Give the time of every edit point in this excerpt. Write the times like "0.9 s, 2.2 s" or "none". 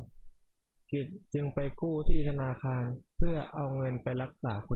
1.2 s, 3.1 s